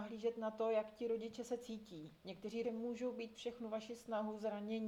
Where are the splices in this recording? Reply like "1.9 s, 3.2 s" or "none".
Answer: 2.6 s, 3.3 s